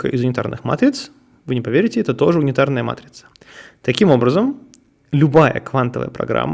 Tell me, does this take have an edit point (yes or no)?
no